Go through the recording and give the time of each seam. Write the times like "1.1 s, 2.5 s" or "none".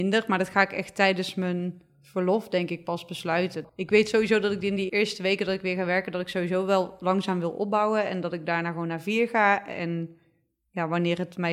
3.7 s, 4.9 s